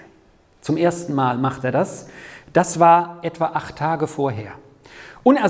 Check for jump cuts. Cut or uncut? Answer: uncut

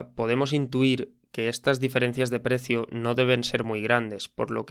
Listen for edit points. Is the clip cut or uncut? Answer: uncut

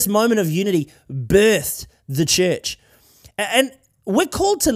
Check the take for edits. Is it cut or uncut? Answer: uncut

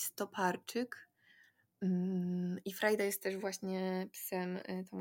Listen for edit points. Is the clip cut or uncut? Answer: uncut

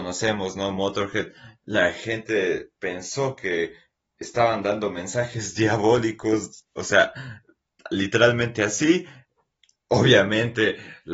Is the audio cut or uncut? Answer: uncut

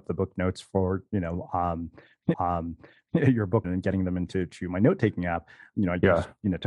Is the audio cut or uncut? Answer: cut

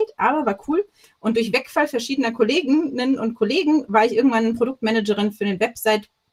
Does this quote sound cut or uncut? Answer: uncut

